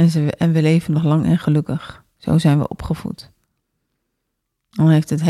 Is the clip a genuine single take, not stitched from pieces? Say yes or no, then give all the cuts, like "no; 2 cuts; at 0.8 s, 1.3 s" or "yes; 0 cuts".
yes; 0 cuts